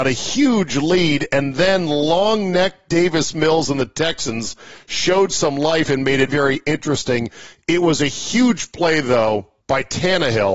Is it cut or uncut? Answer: cut